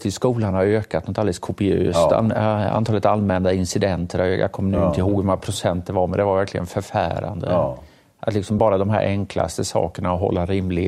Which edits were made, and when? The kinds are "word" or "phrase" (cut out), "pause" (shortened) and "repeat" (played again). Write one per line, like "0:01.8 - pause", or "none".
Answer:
none